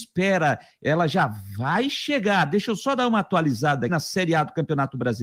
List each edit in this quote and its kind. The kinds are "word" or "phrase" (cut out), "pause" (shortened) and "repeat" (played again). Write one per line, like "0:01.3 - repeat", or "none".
0:03.9 - word